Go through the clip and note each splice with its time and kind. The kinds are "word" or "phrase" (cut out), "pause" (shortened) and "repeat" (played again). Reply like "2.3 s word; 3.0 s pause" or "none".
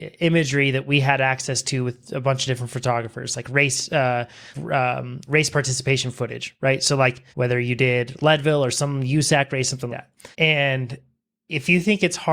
4.5 s word; 5.3 s word; 7.3 s pause; 9.9 s word; 10.3 s pause

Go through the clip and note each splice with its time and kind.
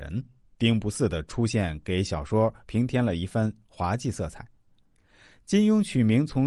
none

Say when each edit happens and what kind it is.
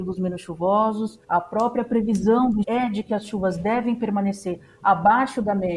1.2 s pause; 2.6 s phrase

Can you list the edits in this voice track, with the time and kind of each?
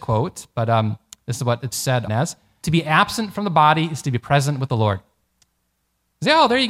1.7 s word; 2.1 s word; 2.6 s word

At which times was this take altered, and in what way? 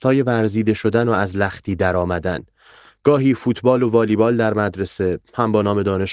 none

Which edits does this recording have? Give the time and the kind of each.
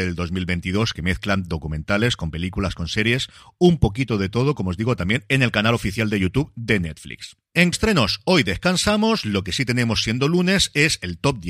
7.7 s phrase

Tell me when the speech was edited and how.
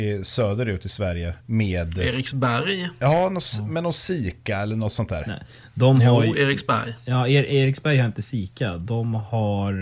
1.4 s pause

